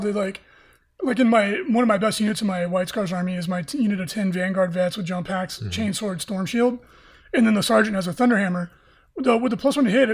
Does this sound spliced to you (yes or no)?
no